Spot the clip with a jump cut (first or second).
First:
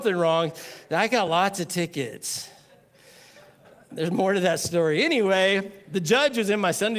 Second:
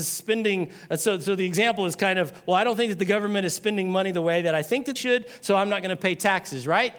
second